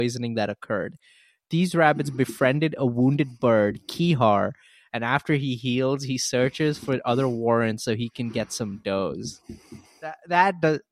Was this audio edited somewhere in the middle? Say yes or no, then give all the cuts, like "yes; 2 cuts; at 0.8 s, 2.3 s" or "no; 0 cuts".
no; 0 cuts